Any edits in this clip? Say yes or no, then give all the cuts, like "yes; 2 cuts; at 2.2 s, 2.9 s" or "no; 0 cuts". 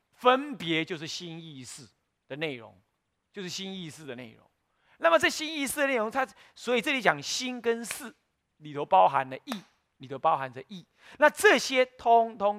no; 0 cuts